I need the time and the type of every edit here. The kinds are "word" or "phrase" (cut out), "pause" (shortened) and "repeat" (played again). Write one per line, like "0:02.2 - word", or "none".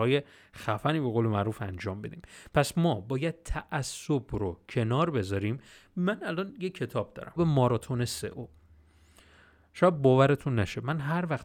0:07.4 - word